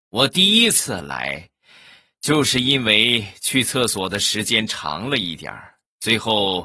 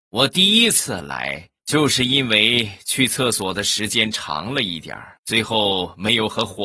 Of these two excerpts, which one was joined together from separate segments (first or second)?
second